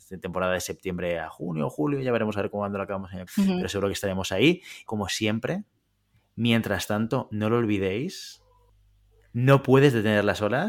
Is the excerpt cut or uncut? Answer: cut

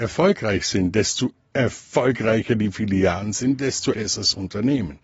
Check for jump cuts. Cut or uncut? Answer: cut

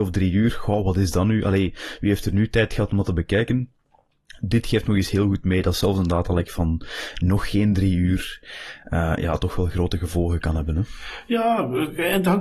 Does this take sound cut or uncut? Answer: uncut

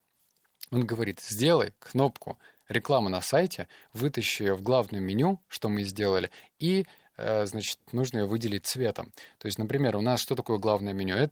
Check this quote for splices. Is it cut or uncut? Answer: uncut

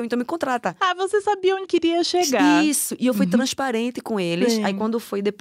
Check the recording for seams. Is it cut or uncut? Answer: cut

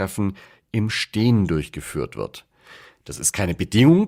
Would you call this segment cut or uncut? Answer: uncut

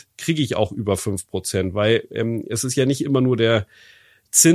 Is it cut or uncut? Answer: uncut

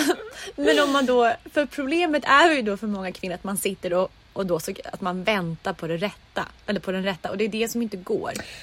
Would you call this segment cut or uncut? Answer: uncut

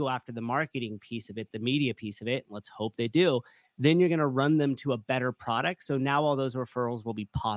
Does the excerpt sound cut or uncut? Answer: uncut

